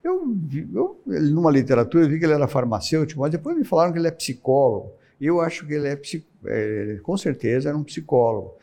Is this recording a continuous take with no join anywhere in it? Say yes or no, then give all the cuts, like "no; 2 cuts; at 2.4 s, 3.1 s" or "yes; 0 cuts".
yes; 0 cuts